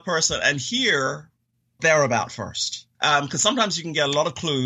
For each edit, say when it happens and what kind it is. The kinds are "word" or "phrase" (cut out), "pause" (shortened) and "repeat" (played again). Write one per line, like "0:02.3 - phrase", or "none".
0:01.8 - word
0:02.9 - pause